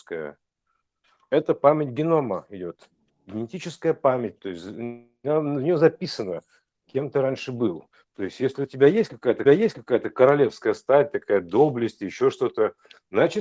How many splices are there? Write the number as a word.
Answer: one